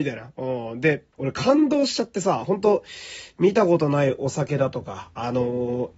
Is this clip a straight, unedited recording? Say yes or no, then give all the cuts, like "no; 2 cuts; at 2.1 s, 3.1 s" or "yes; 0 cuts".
no; 1 cut; at 1.1 s